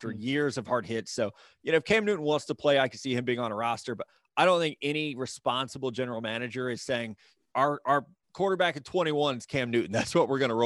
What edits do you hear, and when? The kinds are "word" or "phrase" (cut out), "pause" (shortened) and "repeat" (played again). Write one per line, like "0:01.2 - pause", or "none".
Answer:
none